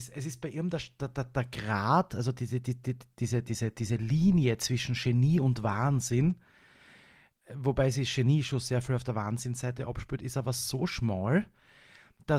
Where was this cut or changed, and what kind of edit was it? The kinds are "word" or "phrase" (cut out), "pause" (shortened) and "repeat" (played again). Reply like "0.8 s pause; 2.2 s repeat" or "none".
none